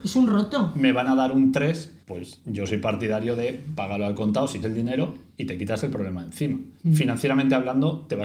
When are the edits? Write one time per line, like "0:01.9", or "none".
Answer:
0:02.0
0:04.6
0:06.8